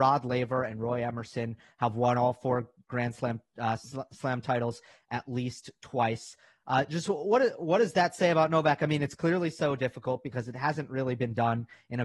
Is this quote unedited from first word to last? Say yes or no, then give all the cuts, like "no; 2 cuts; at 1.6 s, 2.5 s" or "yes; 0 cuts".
yes; 0 cuts